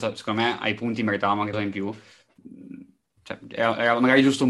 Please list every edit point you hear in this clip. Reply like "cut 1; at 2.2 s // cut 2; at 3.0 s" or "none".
cut 1; at 1.5 s